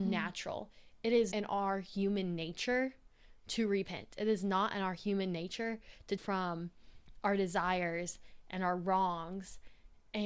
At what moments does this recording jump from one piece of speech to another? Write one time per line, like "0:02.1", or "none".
0:01.3
0:06.2